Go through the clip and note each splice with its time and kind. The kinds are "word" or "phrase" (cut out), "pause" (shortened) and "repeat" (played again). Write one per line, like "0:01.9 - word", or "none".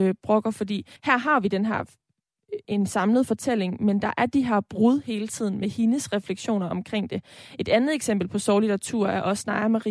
0:01.0 - pause
0:02.6 - word

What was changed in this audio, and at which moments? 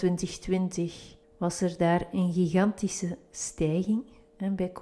0:01.2 - pause

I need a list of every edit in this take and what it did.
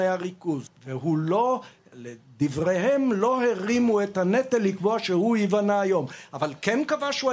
none

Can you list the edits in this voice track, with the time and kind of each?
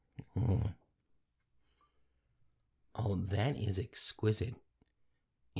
none

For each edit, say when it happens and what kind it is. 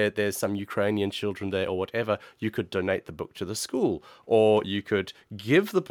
none

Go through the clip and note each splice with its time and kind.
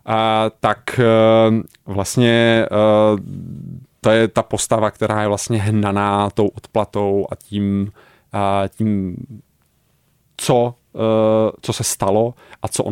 none

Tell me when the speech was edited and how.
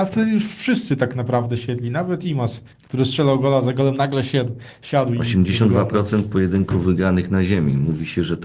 0:02.7 - pause

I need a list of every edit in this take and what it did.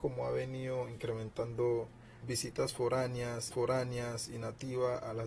0:02.2 - word
0:03.5 - repeat

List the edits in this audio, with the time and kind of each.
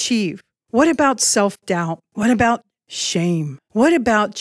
none

